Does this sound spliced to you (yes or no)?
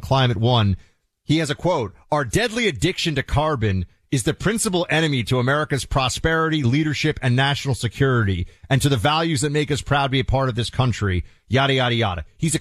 no